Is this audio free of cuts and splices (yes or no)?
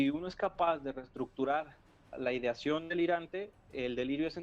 no